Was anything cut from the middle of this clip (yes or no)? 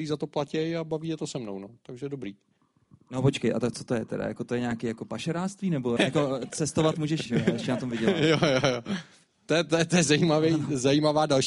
yes